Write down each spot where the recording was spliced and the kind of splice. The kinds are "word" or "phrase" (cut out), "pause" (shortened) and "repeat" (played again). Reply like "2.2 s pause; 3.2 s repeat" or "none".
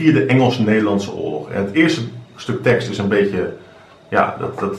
none